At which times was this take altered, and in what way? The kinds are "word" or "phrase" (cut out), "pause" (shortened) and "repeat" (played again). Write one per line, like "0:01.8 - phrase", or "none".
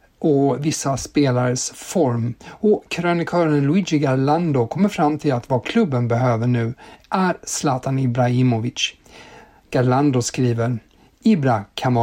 none